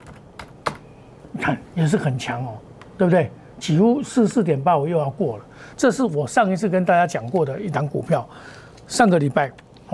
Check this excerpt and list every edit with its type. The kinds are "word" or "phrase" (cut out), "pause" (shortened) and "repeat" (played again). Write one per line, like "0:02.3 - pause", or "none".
0:01.3 - pause